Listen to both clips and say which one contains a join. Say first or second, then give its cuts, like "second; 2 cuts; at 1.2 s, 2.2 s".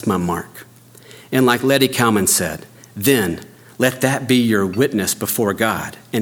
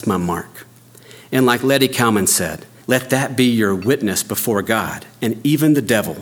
second; 1 cut; at 2.8 s